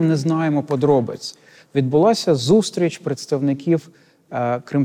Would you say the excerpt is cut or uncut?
uncut